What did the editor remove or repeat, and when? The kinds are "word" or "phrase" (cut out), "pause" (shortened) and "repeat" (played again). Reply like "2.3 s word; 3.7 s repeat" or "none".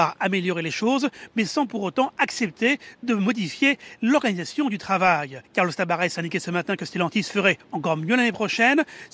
5.4 s pause